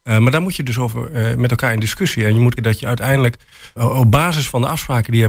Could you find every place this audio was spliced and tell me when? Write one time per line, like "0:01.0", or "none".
0:02.6
0:03.8